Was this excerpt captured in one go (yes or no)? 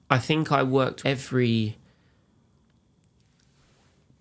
no